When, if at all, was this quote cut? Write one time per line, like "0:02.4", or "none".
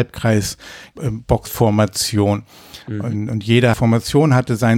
0:00.9
0:01.5
0:02.8
0:03.7